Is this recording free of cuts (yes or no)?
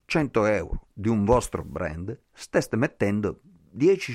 yes